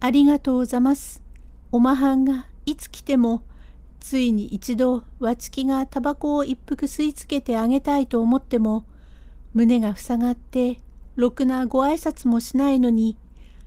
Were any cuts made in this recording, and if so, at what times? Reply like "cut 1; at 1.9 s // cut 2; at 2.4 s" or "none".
cut 1; at 1.6 s